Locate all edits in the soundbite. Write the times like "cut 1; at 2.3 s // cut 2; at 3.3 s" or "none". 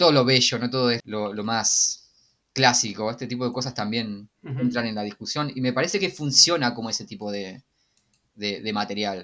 cut 1; at 1.0 s // cut 2; at 4.3 s